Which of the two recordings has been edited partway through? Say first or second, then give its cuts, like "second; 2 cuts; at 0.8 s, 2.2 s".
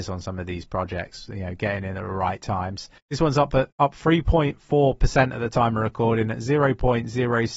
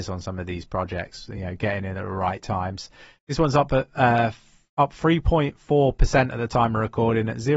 first; 2 cuts; at 3.0 s, 3.7 s